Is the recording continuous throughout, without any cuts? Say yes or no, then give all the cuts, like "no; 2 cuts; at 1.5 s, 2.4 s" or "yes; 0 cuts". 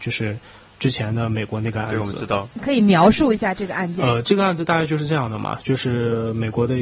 no; 1 cut; at 2.5 s